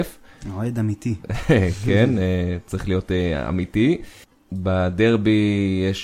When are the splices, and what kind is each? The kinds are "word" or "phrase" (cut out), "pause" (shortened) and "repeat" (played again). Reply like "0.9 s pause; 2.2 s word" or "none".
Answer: 4.2 s pause